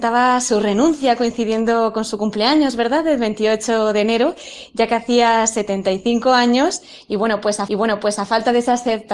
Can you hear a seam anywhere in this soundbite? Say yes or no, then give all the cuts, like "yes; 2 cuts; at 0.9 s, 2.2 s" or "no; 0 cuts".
yes; 1 cut; at 7.7 s